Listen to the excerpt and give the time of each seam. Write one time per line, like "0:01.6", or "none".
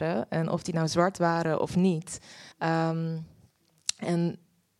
0:02.5